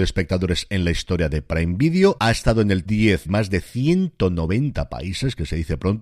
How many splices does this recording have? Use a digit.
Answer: 2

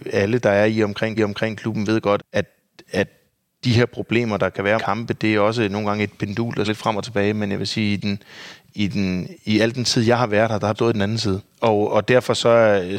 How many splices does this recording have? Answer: 6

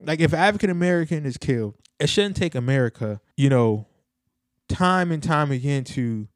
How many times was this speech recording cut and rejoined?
2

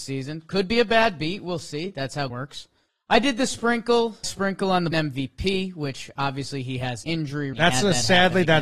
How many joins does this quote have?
6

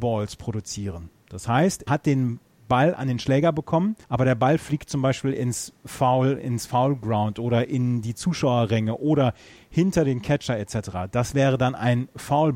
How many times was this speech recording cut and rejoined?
2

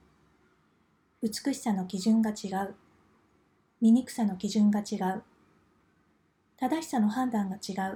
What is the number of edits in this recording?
0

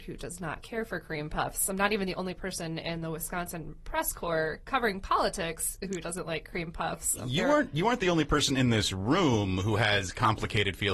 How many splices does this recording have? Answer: 0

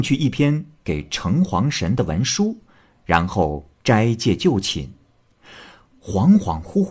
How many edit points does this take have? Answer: 0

